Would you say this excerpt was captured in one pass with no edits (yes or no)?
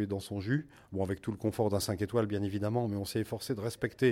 yes